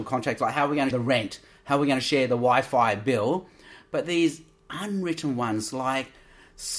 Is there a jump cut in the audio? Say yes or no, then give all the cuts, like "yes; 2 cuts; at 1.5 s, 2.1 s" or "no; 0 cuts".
yes; 1 cut; at 0.9 s